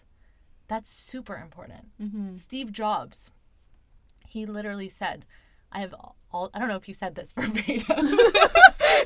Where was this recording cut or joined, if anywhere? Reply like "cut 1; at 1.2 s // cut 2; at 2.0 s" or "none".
none